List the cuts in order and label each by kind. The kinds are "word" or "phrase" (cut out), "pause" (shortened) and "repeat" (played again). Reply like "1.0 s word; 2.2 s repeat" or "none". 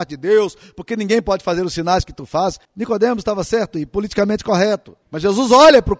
2.6 s pause; 5.0 s pause